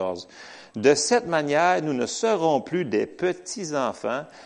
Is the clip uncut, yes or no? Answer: yes